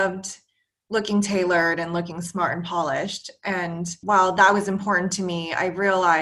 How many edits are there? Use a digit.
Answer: 1